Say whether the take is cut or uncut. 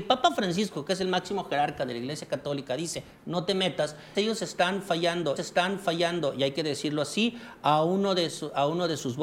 cut